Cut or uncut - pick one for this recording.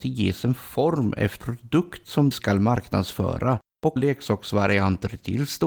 cut